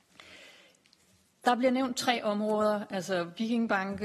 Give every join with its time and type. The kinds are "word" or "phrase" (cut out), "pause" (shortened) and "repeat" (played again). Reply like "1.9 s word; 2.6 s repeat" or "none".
none